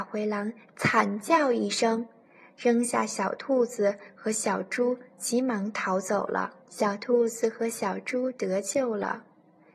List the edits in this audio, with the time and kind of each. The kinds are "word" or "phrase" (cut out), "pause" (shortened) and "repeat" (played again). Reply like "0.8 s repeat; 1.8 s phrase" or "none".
6.6 s pause